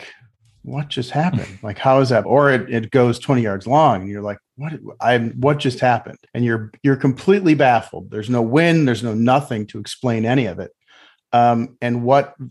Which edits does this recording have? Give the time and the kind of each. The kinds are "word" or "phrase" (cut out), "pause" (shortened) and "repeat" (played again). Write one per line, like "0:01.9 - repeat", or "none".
0:02.2 - word
0:06.3 - pause